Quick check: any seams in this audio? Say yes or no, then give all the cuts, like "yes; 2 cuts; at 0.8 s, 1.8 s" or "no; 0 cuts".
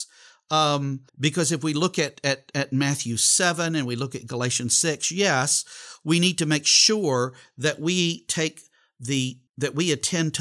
yes; 2 cuts; at 1.1 s, 9.5 s